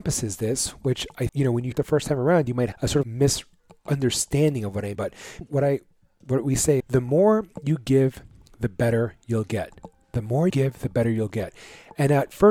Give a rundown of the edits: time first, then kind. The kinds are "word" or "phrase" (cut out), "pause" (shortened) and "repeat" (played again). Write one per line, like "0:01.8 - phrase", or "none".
0:01.3 - word
0:01.7 - word
0:02.7 - word
0:03.0 - word
0:04.9 - word
0:05.4 - word
0:06.8 - word
0:10.5 - word